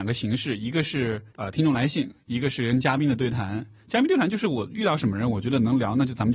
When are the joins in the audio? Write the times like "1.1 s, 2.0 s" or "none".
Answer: 1.3 s